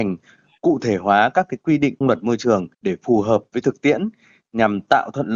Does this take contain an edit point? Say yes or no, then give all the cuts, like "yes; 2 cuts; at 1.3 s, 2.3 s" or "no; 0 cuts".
yes; 2 cuts; at 2.0 s, 2.7 s